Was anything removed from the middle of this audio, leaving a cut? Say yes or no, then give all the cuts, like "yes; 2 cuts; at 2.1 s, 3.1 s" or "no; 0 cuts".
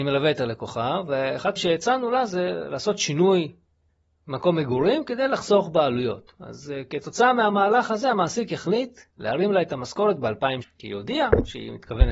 yes; 4 cuts; at 1.6 s, 3.9 s, 9.1 s, 10.6 s